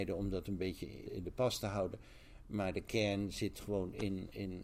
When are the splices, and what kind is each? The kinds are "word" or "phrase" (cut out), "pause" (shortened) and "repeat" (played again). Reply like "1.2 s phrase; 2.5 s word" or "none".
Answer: 1.1 s word